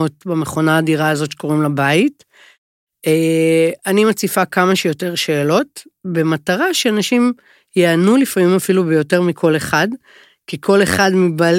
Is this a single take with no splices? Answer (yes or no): yes